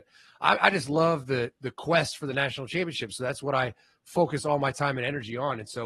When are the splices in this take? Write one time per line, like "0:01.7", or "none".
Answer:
none